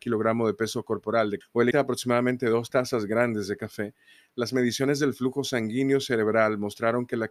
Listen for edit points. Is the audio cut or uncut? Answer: cut